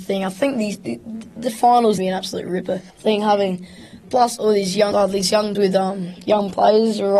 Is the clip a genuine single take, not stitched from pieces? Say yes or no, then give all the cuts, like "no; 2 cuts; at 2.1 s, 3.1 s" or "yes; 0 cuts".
no; 4 cuts; at 2.0 s, 2.9 s, 4.0 s, 5.5 s